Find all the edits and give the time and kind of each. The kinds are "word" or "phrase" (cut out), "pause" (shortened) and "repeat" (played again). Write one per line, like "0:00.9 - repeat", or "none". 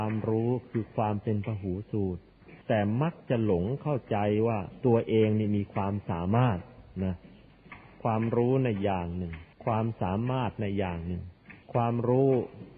0:02.6 - pause
0:09.5 - pause
0:11.6 - pause